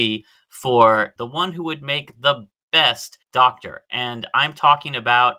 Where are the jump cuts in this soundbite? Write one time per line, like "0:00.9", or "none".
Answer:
0:01.2
0:03.2